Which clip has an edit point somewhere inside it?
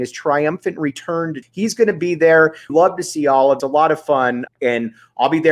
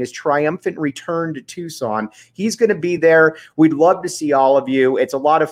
first; 4 cuts; at 1.4 s, 2.7 s, 3.6 s, 4.5 s

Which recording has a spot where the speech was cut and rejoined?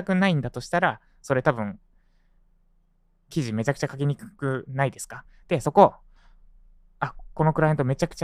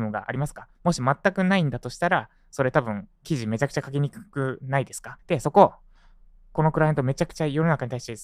second; 3 cuts; at 3.2 s, 5.2 s, 6.5 s

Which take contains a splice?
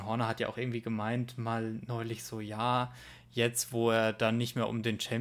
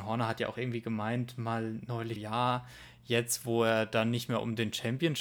second; 1 cut; at 2.2 s

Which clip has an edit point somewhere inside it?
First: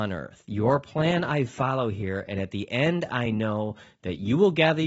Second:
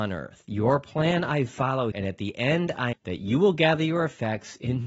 second; 2 cuts; at 1.9 s, 2.9 s

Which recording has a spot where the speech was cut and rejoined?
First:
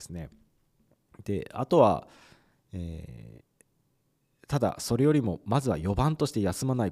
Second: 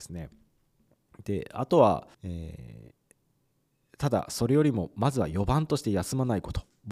second; 1 cut; at 2.1 s

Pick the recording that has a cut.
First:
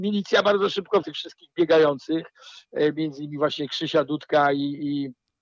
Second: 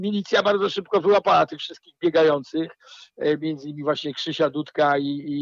first; 1 cut; at 1.0 s

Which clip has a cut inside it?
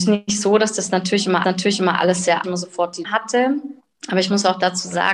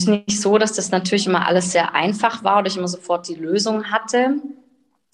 first; 4 cuts; at 1.4 s, 2.4 s, 3.0 s, 3.8 s

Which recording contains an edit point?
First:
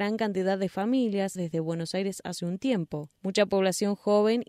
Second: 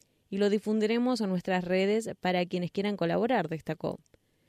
first; 2 cuts; at 1.4 s, 3.2 s

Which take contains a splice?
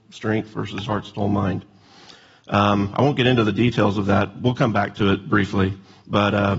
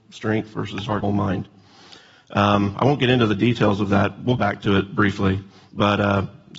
second; 2 cuts; at 1.0 s, 4.4 s

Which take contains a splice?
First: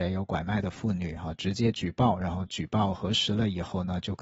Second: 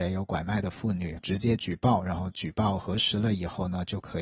second; 1 cut; at 1.2 s

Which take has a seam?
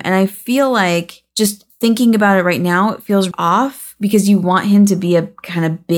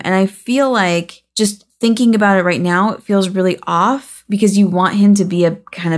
first; 1 cut; at 3.3 s

